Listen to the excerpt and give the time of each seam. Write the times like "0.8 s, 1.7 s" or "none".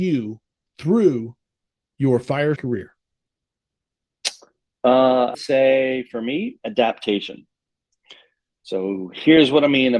2.6 s, 5.3 s